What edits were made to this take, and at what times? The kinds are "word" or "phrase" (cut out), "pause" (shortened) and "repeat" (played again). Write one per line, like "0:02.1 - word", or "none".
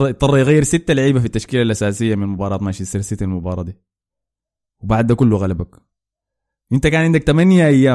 none